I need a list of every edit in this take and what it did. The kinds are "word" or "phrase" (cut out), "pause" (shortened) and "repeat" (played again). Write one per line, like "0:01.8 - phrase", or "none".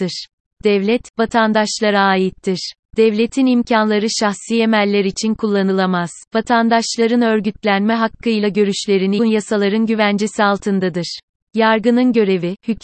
0:06.3 - pause
0:09.2 - phrase